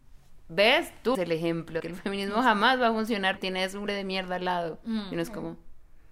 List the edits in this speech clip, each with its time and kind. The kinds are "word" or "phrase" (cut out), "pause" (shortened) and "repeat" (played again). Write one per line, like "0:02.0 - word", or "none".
0:01.1 - word
0:01.8 - word
0:03.4 - word
0:03.9 - word